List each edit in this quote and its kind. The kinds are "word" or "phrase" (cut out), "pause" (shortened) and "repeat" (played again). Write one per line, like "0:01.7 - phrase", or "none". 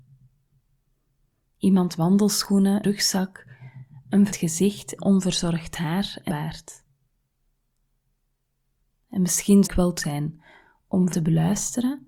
0:02.0 - word
0:02.8 - word
0:04.3 - word
0:05.0 - word
0:06.3 - word
0:09.6 - word
0:10.0 - word
0:11.1 - word